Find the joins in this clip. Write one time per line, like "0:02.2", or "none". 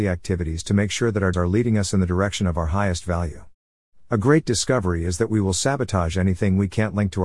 0:01.3